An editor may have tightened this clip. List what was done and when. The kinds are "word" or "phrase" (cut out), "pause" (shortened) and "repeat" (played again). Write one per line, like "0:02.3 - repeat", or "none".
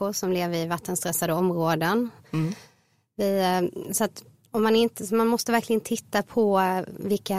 none